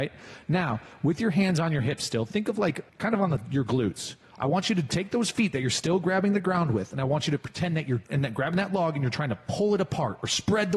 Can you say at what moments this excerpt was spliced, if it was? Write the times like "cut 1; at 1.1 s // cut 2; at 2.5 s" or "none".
cut 1; at 2.9 s // cut 2; at 8.1 s